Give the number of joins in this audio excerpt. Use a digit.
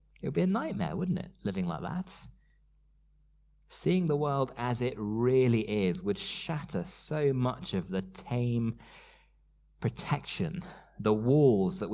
0